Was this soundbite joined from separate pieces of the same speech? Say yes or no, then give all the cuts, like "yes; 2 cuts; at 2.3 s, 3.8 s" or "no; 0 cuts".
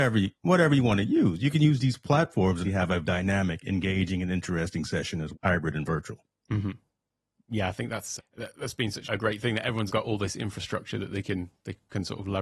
yes; 6 cuts; at 2.6 s, 3.0 s, 5.3 s, 8.2 s, 9.0 s, 9.9 s